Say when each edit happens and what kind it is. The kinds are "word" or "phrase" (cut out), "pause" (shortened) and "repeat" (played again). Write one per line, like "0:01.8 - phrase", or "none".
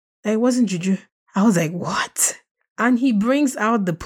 none